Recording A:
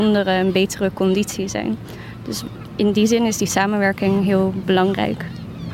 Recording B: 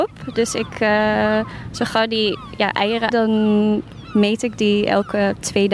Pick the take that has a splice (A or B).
B